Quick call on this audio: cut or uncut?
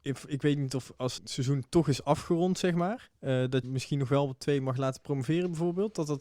cut